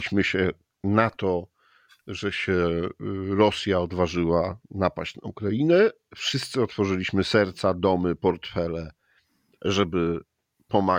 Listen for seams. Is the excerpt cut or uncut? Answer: uncut